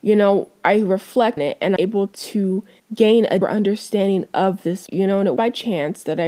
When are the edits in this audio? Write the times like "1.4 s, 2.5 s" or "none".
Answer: 1.4 s, 1.8 s, 3.4 s, 4.9 s, 5.4 s